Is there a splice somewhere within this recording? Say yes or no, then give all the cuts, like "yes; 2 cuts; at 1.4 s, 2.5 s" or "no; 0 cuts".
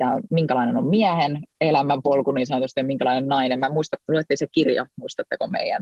yes; 1 cut; at 4.0 s